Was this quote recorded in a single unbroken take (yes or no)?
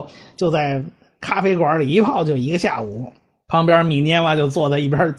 yes